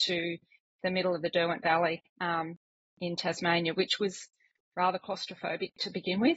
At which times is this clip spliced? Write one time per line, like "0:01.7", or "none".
none